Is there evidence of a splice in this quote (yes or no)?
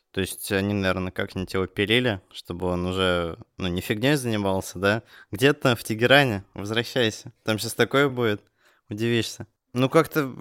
no